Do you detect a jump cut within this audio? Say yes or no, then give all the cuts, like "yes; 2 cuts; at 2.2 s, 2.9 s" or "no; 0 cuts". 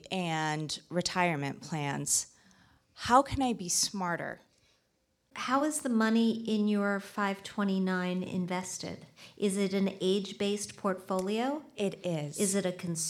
no; 0 cuts